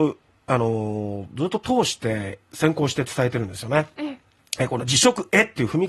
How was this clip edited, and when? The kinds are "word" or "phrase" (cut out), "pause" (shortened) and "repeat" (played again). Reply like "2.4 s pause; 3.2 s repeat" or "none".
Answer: none